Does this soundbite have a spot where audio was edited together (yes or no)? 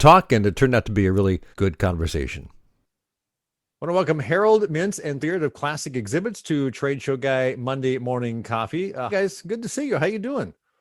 yes